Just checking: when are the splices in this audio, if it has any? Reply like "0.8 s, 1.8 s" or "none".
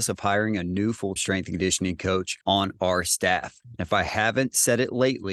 1.2 s, 2.4 s